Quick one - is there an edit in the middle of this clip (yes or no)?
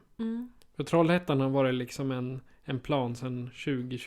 no